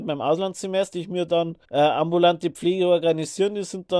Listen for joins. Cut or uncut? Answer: cut